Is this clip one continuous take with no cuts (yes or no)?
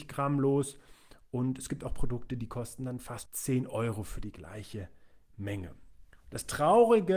no